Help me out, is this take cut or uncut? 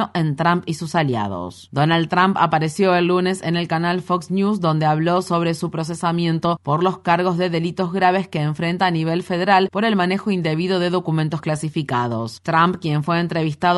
uncut